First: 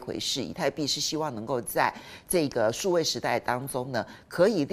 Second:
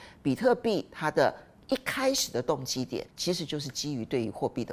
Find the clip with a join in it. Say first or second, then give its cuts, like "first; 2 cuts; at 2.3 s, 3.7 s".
second; 1 cut; at 3.1 s